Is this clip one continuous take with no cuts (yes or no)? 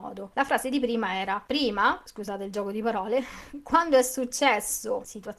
yes